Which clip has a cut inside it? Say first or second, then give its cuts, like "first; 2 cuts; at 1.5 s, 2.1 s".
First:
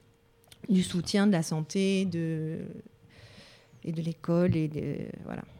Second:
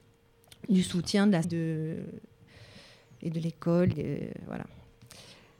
second; 2 cuts; at 1.4 s, 3.9 s